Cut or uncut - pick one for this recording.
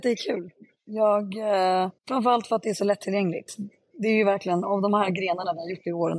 cut